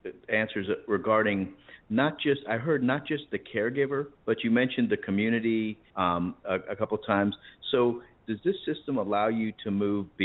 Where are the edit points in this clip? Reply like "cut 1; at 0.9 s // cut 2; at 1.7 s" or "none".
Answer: cut 1; at 4.1 s // cut 2; at 5.9 s